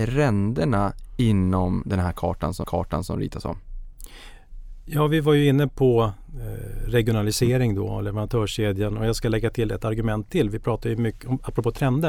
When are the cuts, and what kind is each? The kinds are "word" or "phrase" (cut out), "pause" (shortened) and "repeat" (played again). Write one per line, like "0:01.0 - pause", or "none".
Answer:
0:02.6 - repeat